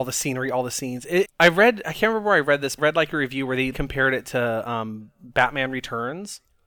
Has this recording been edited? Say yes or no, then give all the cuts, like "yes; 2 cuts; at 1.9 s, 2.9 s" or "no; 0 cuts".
yes; 4 cuts; at 1.2 s, 1.8 s, 2.8 s, 3.7 s